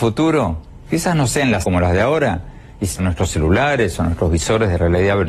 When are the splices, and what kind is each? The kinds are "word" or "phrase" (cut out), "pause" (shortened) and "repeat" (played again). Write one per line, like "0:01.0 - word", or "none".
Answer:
0:01.6 - word
0:03.0 - word

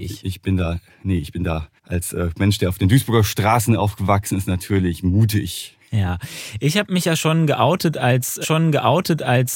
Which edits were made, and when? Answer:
0:01.8 - pause
0:08.4 - repeat

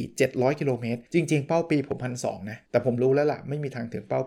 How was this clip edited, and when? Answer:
0:01.1 - pause
0:02.7 - pause

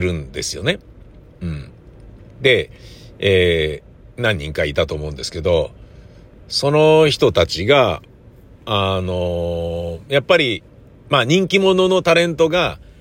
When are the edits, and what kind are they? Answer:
0:02.3 - pause

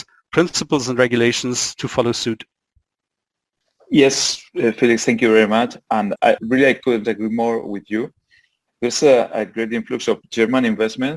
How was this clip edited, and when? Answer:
none

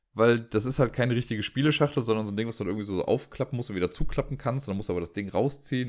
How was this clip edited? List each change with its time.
none

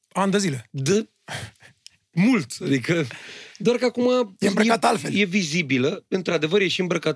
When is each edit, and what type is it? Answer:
none

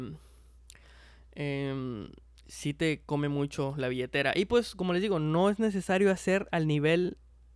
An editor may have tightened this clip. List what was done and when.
none

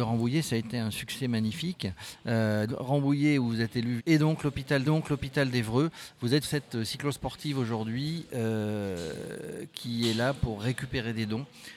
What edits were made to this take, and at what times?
0:02.7 - word
0:04.0 - phrase
0:04.8 - repeat
0:06.4 - word

